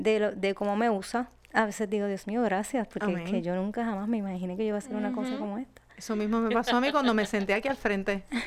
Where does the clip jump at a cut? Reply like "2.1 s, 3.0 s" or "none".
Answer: 1.4 s